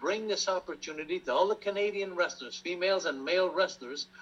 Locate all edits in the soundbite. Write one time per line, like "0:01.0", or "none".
none